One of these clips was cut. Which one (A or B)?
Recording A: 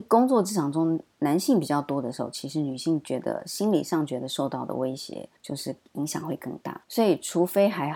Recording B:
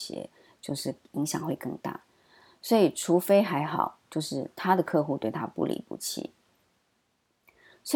A